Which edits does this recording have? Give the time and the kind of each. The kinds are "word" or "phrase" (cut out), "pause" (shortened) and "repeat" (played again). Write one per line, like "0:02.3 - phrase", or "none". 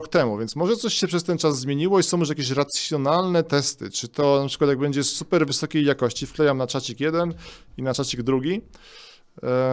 none